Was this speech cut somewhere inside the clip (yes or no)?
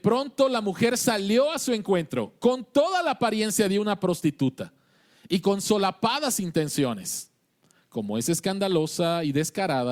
no